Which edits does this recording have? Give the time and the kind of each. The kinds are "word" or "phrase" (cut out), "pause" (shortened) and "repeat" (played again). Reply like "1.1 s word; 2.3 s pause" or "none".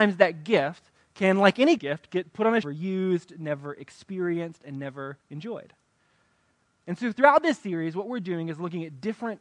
1.8 s word; 2.6 s phrase; 5.2 s pause